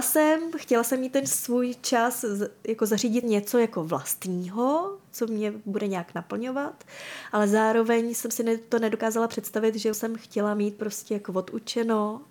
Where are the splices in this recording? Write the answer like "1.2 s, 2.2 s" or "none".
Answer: 3.2 s, 9.9 s